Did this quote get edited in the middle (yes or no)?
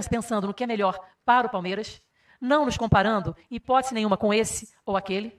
no